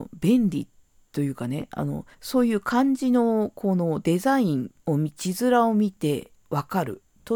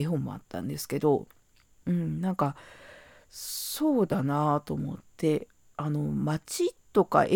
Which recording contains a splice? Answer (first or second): first